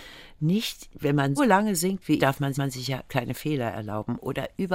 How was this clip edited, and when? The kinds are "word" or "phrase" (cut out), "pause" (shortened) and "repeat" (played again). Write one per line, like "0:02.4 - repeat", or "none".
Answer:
0:01.4 - word
0:02.2 - word
0:02.5 - repeat
0:03.1 - word

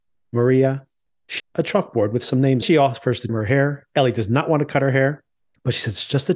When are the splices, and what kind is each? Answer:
0:01.4 - word
0:02.6 - phrase
0:03.3 - word

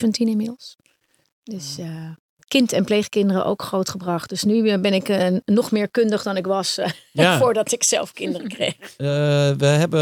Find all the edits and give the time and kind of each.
none

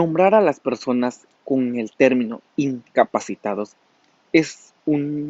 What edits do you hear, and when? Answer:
0:01.3 - pause
0:02.5 - pause

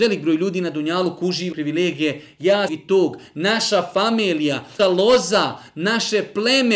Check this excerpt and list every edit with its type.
0:01.5 - word
0:02.7 - phrase
0:04.8 - word

